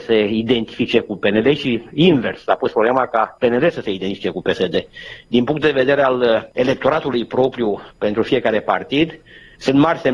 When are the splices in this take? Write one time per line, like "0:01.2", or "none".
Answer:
0:07.9